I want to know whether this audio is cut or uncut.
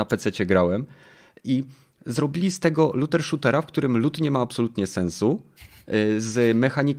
uncut